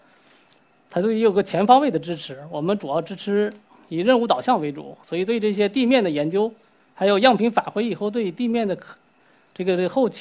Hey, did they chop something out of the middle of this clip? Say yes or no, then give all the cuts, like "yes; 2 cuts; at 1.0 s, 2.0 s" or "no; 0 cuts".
no; 0 cuts